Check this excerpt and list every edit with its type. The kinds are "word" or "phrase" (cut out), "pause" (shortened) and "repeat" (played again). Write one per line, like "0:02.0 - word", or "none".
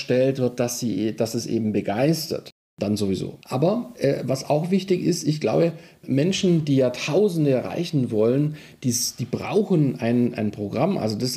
0:03.4 - pause